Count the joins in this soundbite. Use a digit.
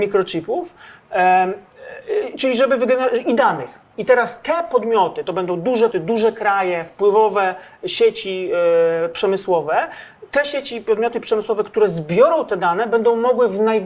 1